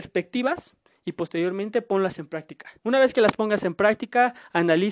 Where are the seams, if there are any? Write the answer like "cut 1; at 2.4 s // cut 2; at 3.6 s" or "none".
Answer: cut 1; at 2.8 s